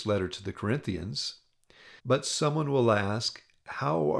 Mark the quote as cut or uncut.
cut